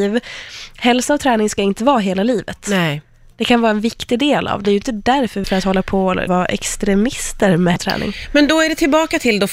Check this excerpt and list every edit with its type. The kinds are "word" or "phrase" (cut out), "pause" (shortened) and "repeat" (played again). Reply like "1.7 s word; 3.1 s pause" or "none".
4.6 s word; 5.4 s word; 6.3 s word; 7.8 s word

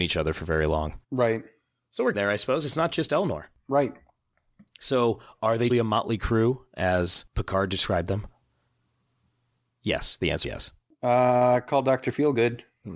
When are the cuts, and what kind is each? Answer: 1.0 s pause; 2.1 s word; 5.7 s word; 10.4 s word

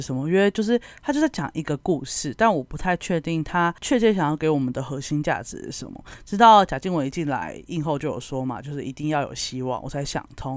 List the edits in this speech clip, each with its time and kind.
3.8 s pause

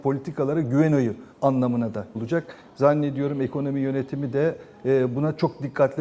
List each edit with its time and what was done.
1.3 s pause; 2.1 s word

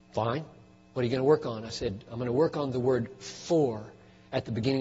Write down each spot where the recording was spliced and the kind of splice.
none

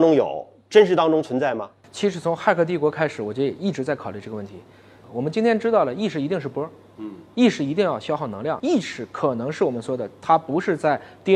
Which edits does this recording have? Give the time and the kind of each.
none

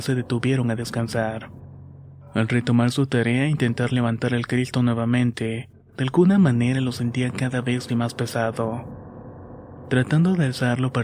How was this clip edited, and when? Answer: 7.9 s word

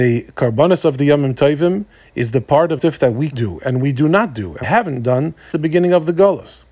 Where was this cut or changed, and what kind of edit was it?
2.8 s word; 3.3 s word; 4.6 s word; 5.5 s word

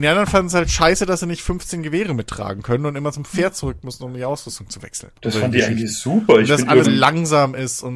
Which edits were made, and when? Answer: 5.2 s pause; 6.8 s word

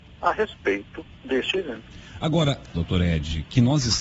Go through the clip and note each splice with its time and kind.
1.1 s pause; 2.7 s phrase

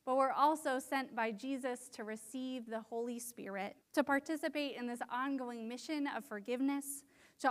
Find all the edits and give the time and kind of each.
3.8 s pause

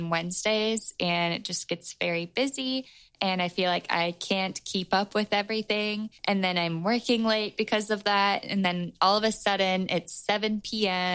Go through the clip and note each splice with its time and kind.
6.2 s pause

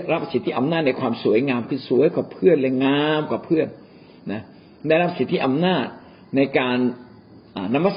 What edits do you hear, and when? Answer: none

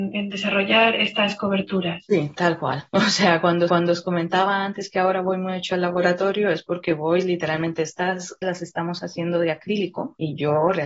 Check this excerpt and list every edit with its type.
3.7 s repeat; 8.4 s word

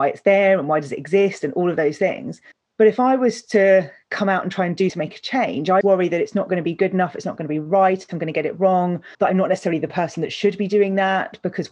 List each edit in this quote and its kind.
2.5 s pause; 4.9 s word; 5.8 s word; 9.1 s pause

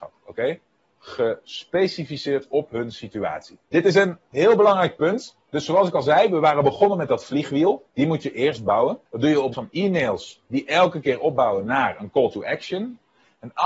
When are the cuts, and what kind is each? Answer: 3.6 s pause; 7.9 s pause; 9.1 s pause; 9.5 s word

